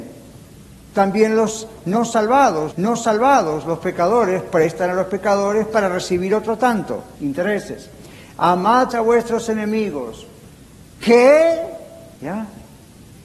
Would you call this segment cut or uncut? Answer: cut